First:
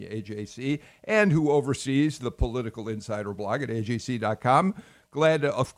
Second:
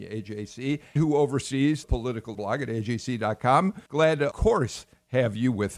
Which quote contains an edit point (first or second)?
second